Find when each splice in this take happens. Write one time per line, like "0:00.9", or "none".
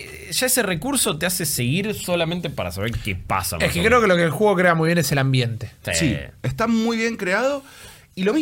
none